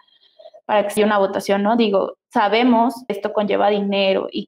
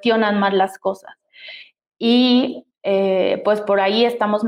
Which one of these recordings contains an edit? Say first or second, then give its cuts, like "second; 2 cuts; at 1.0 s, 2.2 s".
first; 2 cuts; at 1.0 s, 3.1 s